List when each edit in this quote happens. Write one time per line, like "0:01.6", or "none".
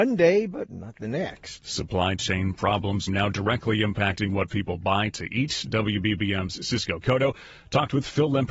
0:03.1